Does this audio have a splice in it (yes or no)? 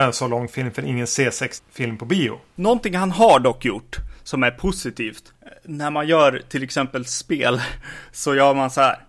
yes